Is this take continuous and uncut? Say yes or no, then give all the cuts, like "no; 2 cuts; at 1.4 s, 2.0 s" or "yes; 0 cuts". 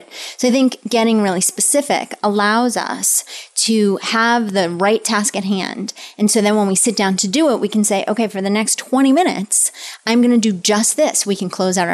yes; 0 cuts